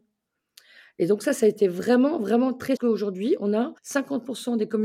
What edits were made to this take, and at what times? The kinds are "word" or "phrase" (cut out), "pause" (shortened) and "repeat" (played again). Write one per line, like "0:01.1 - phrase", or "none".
0:02.8 - phrase
0:03.8 - pause